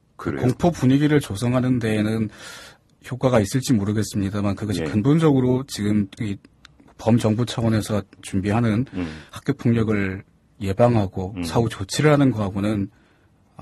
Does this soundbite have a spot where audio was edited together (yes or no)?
no